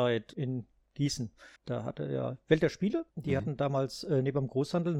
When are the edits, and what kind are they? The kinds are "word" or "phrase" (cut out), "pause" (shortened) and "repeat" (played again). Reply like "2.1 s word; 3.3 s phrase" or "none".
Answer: 1.6 s pause; 3.1 s pause